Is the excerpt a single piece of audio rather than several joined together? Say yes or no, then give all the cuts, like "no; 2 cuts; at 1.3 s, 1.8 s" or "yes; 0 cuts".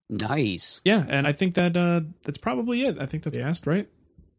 no; 3 cuts; at 1.2 s, 2.2 s, 3.3 s